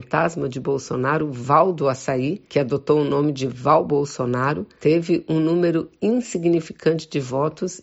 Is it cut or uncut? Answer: uncut